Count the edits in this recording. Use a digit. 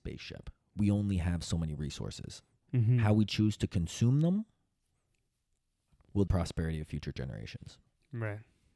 1